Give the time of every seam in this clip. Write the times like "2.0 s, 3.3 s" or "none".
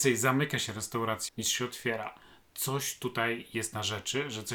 1.3 s